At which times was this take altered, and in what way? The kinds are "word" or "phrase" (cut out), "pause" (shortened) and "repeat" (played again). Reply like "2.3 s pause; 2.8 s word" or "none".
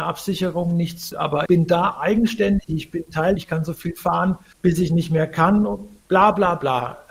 1.1 s word; 1.5 s word; 3.4 s word